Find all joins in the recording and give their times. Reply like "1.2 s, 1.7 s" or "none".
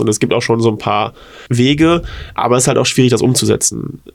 1.5 s